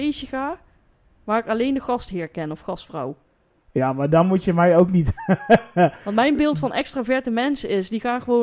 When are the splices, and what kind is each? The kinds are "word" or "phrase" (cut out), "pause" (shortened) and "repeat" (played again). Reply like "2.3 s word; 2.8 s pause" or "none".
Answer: none